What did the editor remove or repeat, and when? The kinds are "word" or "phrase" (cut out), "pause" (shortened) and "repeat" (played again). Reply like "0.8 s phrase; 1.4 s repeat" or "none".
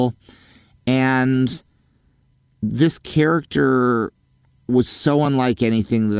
none